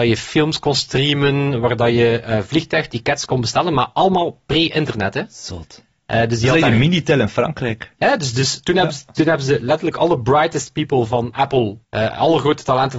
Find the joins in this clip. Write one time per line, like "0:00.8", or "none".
0:11.8